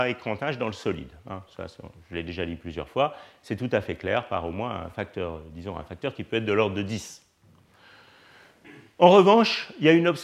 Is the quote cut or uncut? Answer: uncut